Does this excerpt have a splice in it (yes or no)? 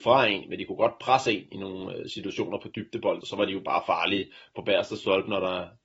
yes